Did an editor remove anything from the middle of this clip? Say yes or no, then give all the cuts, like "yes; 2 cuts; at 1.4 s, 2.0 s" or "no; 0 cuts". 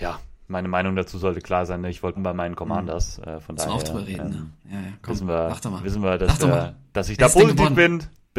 yes; 1 cut; at 2.2 s